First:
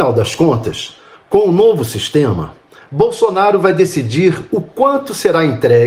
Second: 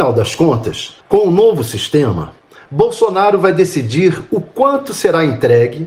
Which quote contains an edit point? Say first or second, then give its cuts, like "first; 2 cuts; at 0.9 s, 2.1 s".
second; 1 cut; at 1.0 s